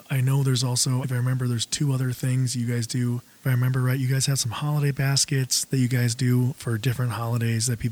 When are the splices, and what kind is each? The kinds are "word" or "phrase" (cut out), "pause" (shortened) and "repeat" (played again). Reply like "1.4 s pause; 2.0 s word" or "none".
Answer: 1.0 s word